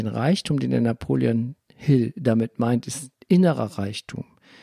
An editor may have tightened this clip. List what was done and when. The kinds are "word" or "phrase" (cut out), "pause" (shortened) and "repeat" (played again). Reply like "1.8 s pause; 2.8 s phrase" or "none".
1.6 s pause